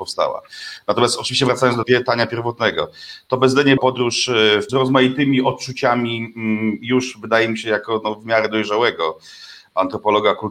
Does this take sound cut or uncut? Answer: cut